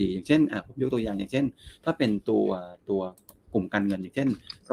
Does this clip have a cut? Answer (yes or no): no